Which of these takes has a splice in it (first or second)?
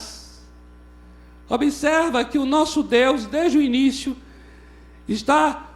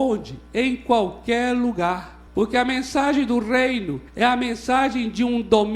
second